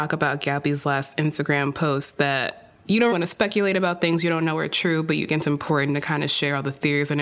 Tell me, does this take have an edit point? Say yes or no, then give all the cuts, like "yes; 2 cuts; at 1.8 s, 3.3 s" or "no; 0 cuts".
yes; 2 cuts; at 3.1 s, 5.3 s